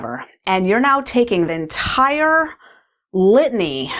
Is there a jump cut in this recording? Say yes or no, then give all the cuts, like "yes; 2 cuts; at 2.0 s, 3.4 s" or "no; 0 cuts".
yes; 1 cut; at 1.5 s